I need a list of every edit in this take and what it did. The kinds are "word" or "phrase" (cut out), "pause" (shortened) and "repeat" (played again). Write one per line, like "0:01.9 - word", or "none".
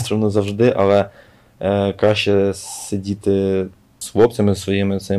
none